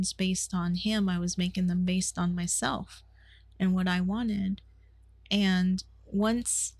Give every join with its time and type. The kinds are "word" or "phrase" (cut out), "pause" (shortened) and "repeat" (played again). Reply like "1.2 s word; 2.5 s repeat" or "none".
none